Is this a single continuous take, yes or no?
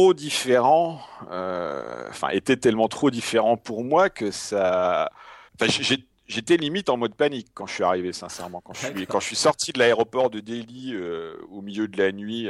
no